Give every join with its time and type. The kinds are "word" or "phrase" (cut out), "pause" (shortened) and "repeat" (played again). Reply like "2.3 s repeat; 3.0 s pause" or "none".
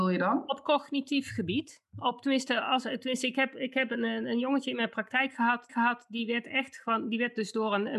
5.7 s repeat